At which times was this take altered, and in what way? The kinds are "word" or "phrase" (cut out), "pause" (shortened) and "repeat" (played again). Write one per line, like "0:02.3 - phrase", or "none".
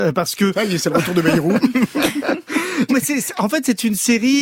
0:02.9 - word